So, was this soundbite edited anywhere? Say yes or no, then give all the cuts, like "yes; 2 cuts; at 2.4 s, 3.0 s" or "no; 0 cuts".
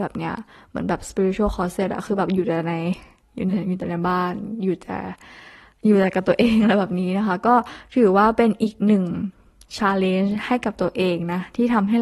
no; 0 cuts